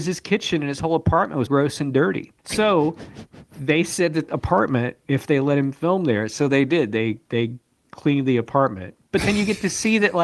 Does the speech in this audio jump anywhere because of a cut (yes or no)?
yes